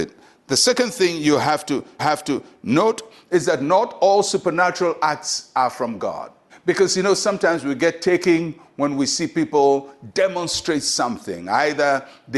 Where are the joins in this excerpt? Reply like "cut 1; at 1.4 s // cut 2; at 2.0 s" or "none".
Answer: cut 1; at 2.0 s // cut 2; at 6.5 s